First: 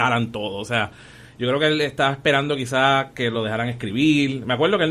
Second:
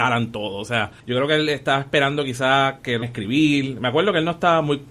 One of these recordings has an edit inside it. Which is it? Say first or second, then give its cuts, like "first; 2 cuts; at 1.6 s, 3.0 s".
second; 2 cuts; at 1.0 s, 3.0 s